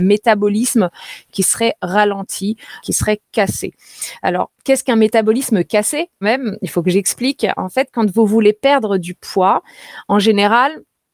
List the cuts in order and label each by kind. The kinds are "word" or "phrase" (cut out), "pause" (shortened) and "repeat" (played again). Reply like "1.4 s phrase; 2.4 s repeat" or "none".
2.8 s word; 4.5 s pause; 6.2 s word